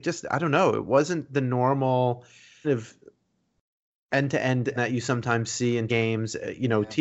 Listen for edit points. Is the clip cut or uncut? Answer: cut